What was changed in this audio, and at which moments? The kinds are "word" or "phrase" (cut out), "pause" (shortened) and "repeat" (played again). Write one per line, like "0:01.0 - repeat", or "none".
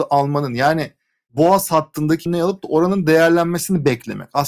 0:02.3 - word